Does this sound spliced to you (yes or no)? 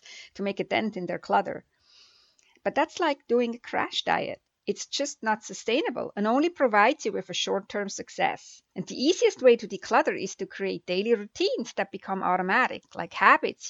yes